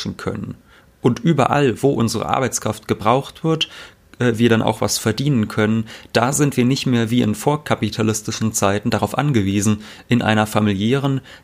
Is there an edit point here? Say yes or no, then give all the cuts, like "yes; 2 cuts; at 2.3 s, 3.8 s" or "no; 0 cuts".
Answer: no; 0 cuts